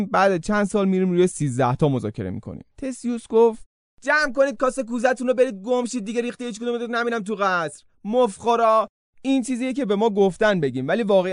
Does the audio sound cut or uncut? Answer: cut